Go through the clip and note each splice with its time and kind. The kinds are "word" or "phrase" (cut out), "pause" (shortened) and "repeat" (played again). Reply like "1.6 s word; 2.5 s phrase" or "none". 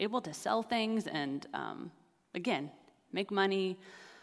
none